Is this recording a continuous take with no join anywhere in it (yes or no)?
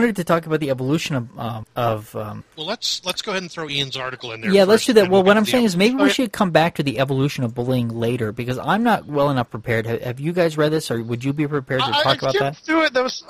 yes